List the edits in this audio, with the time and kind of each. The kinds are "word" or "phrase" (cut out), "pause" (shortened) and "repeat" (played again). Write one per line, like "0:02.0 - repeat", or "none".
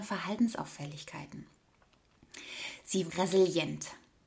0:03.1 - word